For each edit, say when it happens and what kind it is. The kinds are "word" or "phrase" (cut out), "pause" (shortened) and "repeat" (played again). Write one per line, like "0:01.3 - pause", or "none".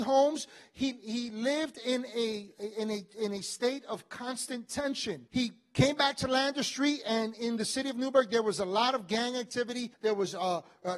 0:05.3 - pause
0:09.9 - pause